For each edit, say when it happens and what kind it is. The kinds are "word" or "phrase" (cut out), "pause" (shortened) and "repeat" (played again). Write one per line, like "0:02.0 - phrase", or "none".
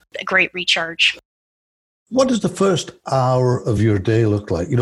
none